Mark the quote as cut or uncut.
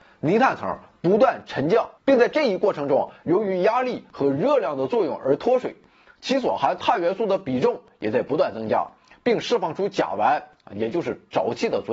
cut